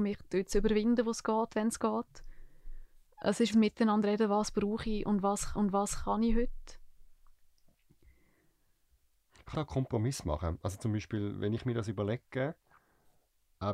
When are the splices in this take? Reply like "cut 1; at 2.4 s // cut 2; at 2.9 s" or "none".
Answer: cut 1; at 3.5 s // cut 2; at 5.5 s // cut 3; at 9.5 s